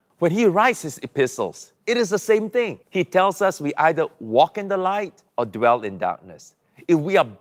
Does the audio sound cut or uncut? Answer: cut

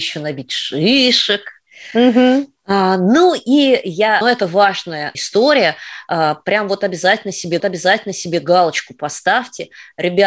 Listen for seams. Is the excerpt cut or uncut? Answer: cut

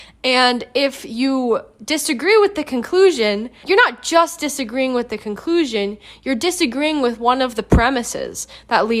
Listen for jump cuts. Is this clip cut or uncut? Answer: cut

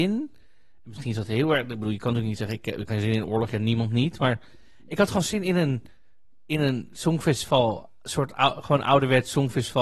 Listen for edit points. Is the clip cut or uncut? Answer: cut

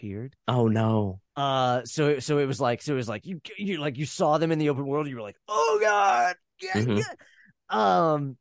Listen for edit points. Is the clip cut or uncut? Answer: uncut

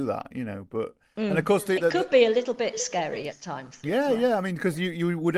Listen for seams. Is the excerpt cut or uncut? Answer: cut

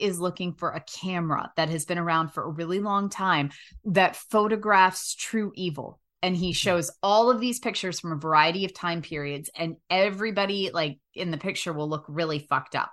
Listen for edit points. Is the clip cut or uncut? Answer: uncut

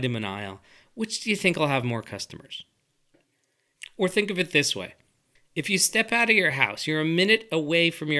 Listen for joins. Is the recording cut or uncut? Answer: uncut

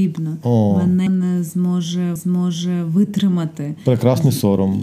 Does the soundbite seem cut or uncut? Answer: cut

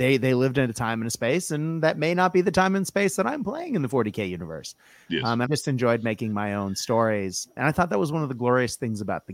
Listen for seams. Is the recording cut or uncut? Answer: cut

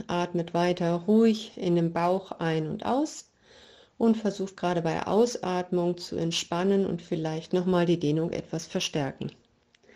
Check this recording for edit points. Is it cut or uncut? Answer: uncut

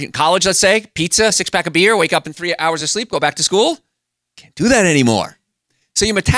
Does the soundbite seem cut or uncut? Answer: uncut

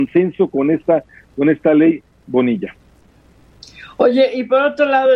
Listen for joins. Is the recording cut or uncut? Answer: uncut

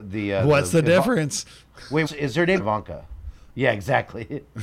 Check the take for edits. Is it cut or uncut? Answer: cut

